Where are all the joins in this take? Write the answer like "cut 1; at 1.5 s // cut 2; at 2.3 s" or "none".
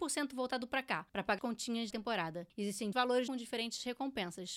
cut 1; at 1.4 s // cut 2; at 1.9 s // cut 3; at 2.9 s // cut 4; at 3.3 s